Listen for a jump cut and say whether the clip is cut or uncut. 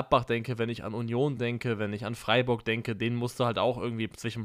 uncut